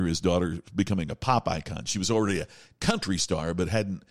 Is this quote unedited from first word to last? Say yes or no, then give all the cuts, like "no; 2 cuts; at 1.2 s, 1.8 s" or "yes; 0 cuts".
yes; 0 cuts